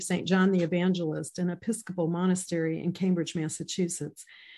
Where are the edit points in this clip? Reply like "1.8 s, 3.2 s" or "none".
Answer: none